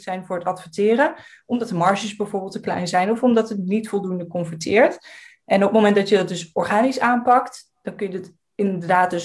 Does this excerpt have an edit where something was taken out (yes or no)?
no